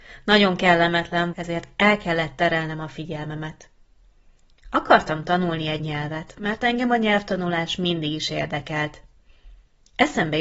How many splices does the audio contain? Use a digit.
2